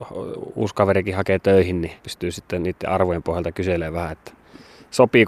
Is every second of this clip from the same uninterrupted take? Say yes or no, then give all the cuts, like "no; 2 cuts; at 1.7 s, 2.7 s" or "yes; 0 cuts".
no; 1 cut; at 2.0 s